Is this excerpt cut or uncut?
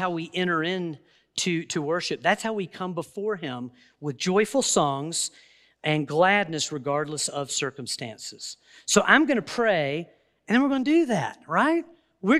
uncut